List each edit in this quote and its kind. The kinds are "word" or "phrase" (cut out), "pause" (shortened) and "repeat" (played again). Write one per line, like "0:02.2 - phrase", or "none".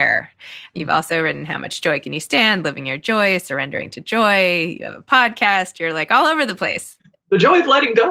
none